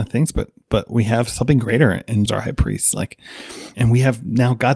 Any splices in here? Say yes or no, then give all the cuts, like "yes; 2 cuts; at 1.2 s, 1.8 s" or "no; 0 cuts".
yes; 2 cuts; at 2.3 s, 3.7 s